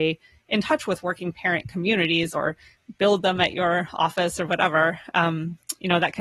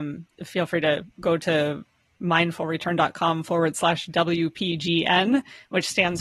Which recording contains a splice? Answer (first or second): second